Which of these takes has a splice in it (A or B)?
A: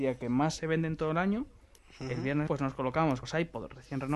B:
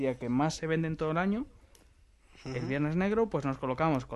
A